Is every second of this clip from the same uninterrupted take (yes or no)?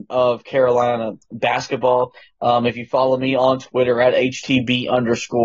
yes